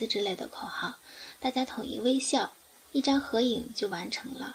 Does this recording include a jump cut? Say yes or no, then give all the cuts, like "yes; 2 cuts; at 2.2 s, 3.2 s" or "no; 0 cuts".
no; 0 cuts